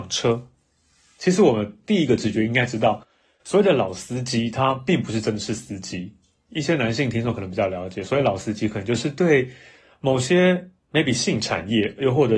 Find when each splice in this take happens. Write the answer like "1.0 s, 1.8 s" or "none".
none